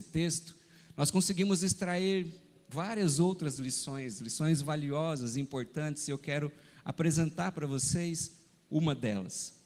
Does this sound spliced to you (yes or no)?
no